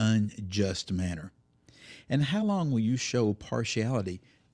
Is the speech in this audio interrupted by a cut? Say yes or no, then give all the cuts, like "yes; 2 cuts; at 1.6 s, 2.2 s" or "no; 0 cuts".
no; 0 cuts